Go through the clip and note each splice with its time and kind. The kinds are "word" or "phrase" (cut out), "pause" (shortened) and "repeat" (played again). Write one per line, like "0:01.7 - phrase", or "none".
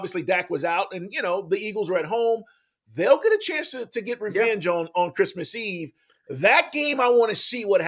none